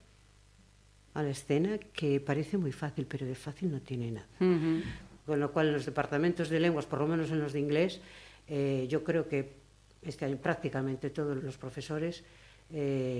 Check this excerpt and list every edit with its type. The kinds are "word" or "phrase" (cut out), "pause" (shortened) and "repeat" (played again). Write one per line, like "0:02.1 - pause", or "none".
0:11.4 - word